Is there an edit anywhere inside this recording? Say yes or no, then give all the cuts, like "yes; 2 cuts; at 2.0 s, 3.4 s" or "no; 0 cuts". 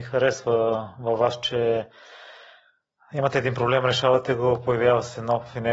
no; 0 cuts